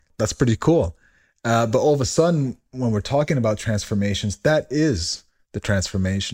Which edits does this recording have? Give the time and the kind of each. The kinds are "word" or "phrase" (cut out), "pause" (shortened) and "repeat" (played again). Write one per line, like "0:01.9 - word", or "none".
none